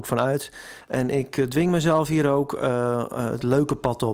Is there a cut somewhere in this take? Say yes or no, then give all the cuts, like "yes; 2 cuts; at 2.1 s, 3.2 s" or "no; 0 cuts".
no; 0 cuts